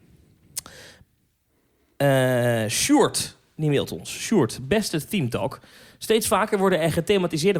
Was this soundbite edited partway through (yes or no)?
no